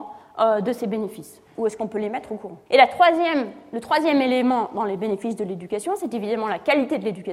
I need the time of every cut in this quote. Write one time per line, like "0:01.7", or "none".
0:02.7